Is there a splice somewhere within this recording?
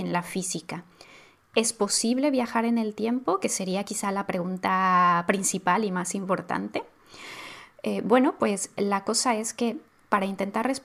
no; 0 cuts

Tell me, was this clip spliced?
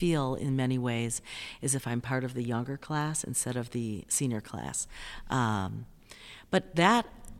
no; 0 cuts

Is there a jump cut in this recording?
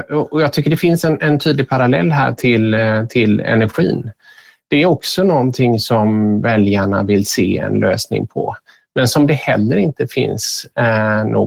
no; 0 cuts

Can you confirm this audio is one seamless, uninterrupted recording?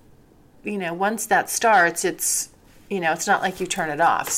yes; 0 cuts

